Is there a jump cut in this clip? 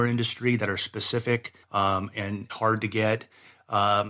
yes; 2 cuts; at 1.6 s, 2.5 s

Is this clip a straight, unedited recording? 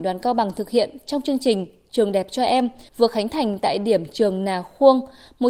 no; 1 cut; at 2.9 s

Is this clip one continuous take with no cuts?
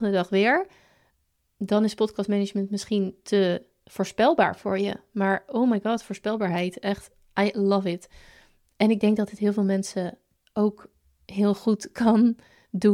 yes; 0 cuts

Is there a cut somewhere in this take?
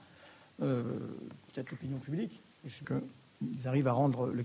yes; 1 cut; at 2.8 s

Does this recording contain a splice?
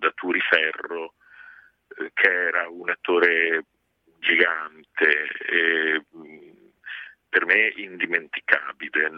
no; 0 cuts

